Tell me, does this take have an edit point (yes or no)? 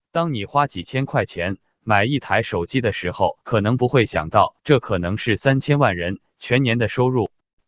yes